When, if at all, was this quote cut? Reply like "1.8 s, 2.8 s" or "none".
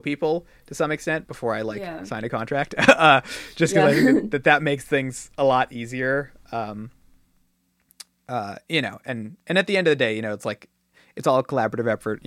none

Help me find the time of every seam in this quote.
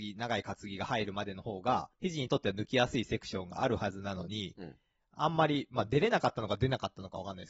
1.9 s

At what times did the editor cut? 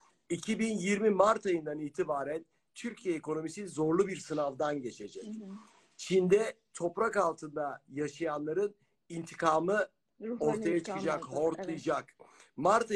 none

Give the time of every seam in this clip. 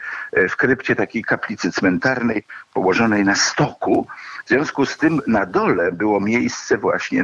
none

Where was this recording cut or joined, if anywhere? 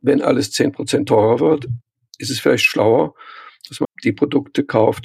3.8 s

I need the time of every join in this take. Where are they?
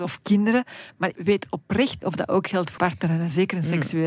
1.1 s, 2.0 s, 2.8 s

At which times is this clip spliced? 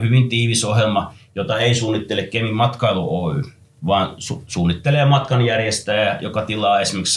none

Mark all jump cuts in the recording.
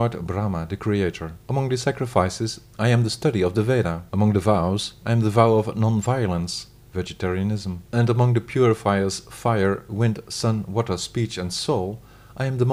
1.4 s, 4.1 s, 7.9 s

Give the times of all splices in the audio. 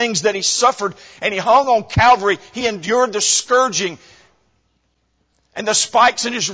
none

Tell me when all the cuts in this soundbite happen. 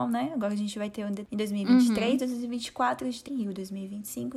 1.2 s, 3.3 s

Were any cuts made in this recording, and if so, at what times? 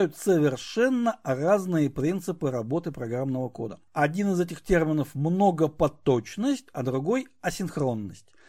3.9 s

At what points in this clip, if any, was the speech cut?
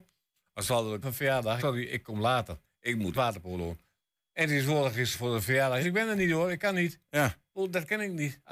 1.0 s, 1.6 s, 3.1 s, 5.1 s, 5.8 s

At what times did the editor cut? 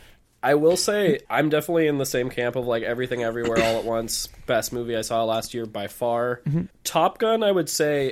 1.2 s, 6.7 s

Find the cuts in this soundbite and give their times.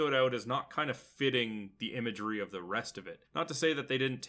3.3 s

